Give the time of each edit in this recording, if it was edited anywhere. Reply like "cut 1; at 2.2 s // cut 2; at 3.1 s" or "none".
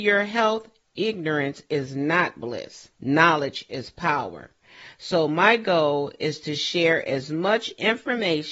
cut 1; at 2.9 s

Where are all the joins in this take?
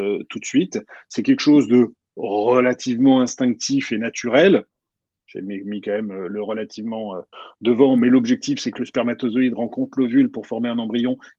none

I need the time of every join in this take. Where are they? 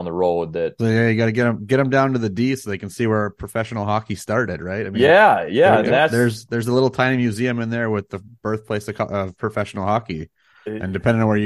none

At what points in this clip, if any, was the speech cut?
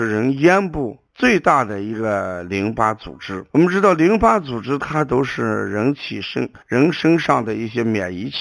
cut 1; at 1.1 s // cut 2; at 3.5 s // cut 3; at 6.6 s

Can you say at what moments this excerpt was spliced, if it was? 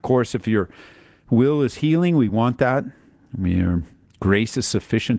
none

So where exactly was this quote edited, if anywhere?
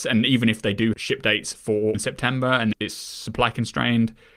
cut 1; at 0.9 s // cut 2; at 1.9 s // cut 3; at 2.7 s

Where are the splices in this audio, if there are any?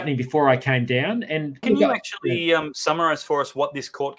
cut 1; at 1.6 s

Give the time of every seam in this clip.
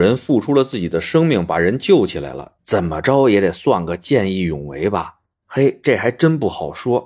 none

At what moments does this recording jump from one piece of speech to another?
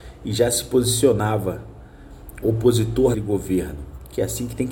cut 1; at 2.4 s // cut 2; at 3.1 s

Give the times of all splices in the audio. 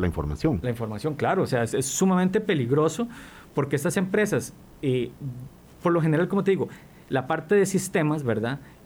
none

